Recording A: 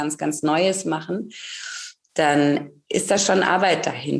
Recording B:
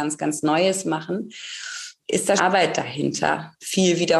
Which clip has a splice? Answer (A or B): B